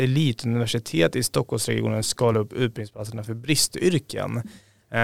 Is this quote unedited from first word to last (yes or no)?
yes